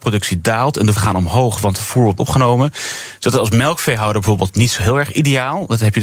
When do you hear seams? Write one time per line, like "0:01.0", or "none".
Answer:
0:01.0
0:02.2